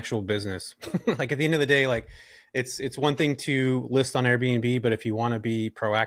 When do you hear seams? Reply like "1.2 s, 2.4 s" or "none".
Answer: none